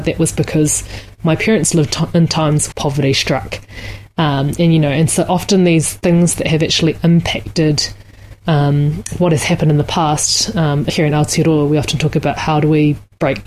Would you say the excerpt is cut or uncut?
cut